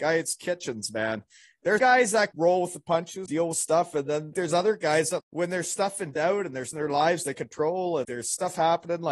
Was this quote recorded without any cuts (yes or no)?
no